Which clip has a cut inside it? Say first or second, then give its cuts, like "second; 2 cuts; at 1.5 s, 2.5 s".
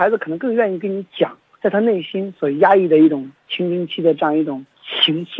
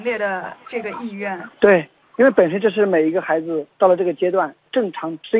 second; 1 cut; at 1.5 s